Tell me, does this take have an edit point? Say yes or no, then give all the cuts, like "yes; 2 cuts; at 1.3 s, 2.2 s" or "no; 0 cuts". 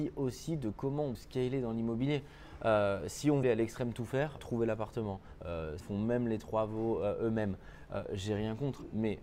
yes; 4 cuts; at 1.1 s, 3.4 s, 4.4 s, 5.8 s